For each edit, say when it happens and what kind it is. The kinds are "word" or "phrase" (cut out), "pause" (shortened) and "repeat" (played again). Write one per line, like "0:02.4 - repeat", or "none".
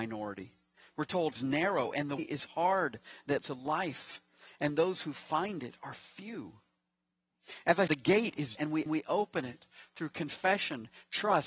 0:01.4 - phrase
0:02.2 - word
0:03.4 - word
0:07.9 - word
0:08.6 - word
0:08.9 - repeat